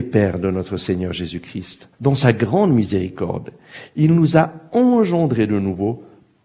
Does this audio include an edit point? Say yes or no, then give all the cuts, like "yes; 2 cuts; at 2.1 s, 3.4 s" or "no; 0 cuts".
yes; 1 cut; at 1.9 s